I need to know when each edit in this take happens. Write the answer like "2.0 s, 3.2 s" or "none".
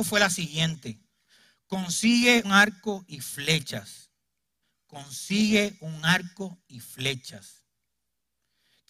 2.4 s, 4.6 s